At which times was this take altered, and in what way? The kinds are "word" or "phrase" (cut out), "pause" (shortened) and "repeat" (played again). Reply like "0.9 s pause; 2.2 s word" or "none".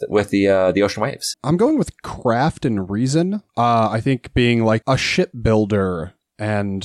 1.3 s word; 4.8 s word